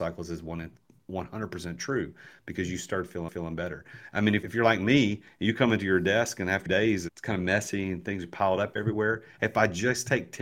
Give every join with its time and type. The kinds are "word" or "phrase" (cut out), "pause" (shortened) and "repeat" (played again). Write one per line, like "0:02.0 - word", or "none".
0:03.3 - repeat
0:06.7 - phrase

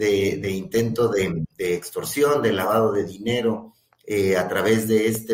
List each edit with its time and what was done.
0:01.5 - pause

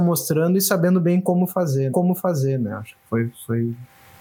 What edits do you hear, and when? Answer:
0:01.9 - repeat
0:02.9 - word

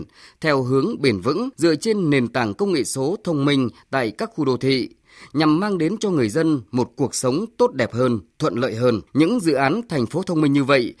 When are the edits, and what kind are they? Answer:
0:01.5 - pause
0:09.1 - pause

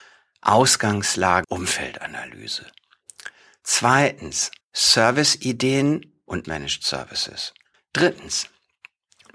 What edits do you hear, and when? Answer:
0:01.4 - word
0:04.6 - pause
0:06.4 - phrase
0:07.7 - pause

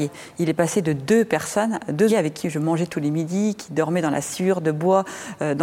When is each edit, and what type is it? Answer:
0:02.1 - word

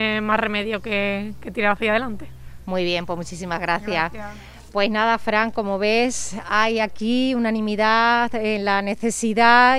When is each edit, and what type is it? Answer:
none

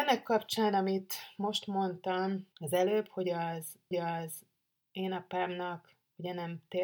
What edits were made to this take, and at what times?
0:02.5 - pause
0:03.9 - repeat

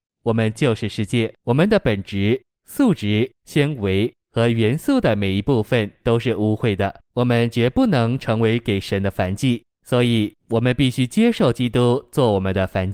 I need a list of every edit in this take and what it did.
0:01.4 - pause
0:03.3 - pause
0:07.1 - pause
0:09.7 - pause

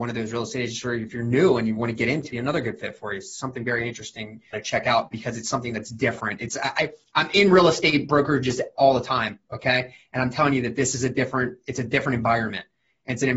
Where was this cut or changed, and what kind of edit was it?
0:02.3 - phrase
0:04.5 - word

